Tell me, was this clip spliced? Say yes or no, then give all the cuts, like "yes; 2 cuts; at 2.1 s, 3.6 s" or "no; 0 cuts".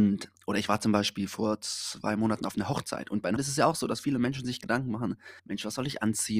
yes; 2 cuts; at 3.4 s, 5.4 s